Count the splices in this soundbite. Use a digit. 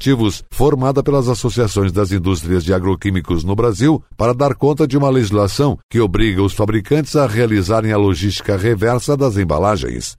0